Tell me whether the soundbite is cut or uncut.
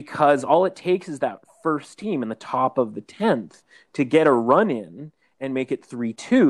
uncut